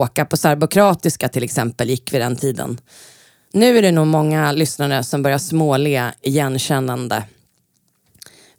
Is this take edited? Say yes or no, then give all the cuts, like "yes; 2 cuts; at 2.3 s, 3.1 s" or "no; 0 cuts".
no; 0 cuts